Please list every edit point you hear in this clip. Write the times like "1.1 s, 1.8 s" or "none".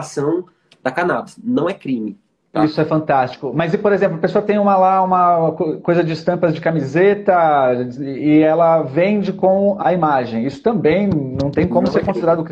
2.3 s, 9.8 s